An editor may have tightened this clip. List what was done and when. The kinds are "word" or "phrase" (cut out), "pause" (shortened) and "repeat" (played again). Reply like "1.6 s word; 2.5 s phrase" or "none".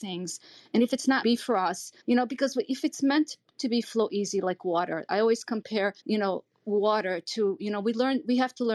1.2 s phrase; 2.0 s pause; 3.8 s phrase; 6.0 s pause